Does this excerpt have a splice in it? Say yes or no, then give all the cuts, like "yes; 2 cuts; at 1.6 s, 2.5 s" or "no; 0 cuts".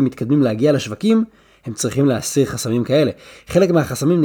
no; 0 cuts